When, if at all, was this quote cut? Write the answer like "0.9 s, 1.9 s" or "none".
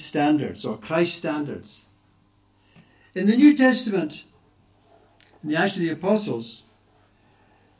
none